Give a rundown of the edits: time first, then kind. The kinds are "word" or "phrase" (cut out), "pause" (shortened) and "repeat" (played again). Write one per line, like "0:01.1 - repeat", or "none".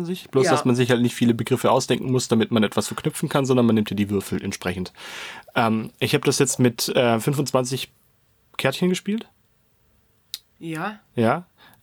none